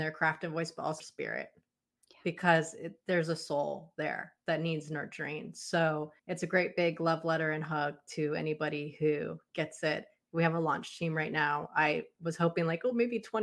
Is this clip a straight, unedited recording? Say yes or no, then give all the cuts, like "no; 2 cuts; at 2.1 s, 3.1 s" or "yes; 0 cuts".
no; 2 cuts; at 1.0 s, 6.2 s